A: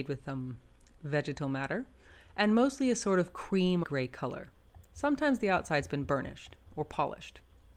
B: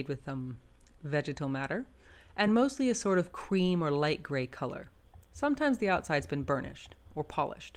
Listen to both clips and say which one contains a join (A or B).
A